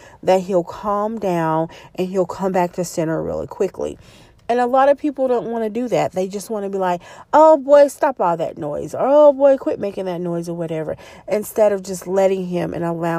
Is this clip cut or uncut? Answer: uncut